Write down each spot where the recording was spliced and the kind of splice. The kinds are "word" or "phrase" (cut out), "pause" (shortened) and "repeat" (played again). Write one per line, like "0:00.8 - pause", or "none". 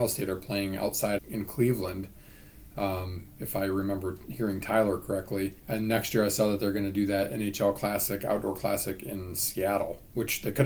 0:01.2 - word
0:05.6 - pause